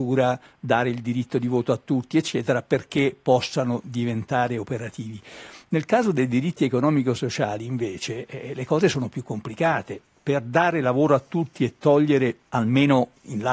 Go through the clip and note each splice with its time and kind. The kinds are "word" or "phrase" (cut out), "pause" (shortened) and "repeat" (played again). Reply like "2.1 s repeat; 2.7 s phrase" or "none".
none